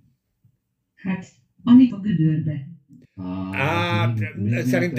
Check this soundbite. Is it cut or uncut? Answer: cut